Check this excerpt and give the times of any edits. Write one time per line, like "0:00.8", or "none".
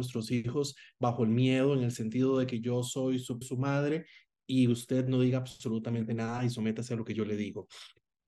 0:03.4